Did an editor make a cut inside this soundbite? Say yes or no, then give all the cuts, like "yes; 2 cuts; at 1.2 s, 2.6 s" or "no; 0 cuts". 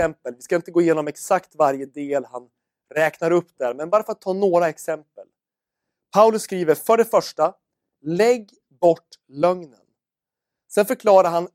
no; 0 cuts